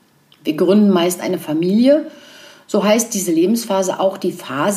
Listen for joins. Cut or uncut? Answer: uncut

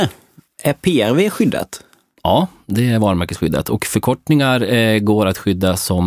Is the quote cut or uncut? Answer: uncut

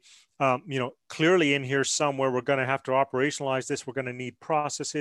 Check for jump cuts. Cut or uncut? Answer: uncut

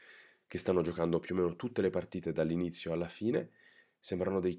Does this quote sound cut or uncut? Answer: uncut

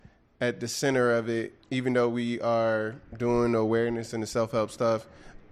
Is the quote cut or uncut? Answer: cut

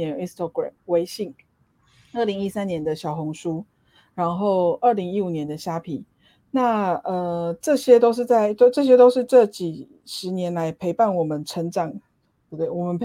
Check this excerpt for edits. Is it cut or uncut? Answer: uncut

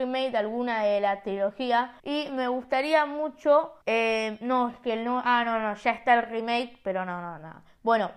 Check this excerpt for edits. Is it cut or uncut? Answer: cut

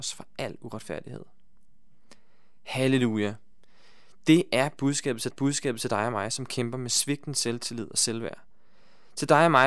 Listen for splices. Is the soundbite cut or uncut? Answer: cut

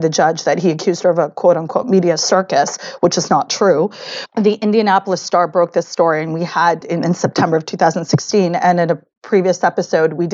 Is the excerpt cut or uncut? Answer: uncut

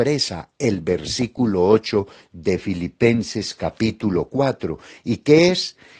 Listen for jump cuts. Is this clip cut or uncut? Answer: uncut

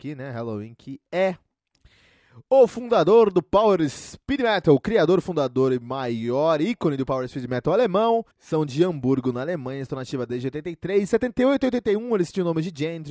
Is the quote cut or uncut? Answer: cut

